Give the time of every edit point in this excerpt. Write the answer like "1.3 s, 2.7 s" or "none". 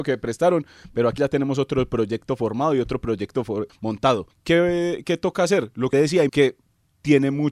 1.2 s, 3.7 s, 4.3 s, 5.9 s, 6.3 s